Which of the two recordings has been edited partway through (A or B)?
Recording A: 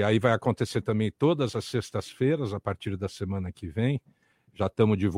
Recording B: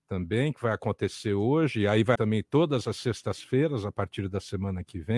B